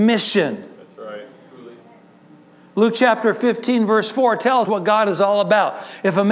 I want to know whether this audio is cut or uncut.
cut